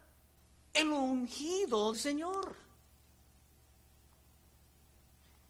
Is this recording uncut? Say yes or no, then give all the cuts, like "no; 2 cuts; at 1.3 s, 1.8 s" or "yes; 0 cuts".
no; 1 cut; at 1.9 s